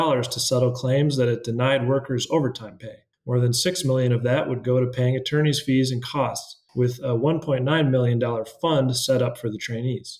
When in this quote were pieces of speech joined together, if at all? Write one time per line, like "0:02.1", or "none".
0:03.1
0:06.7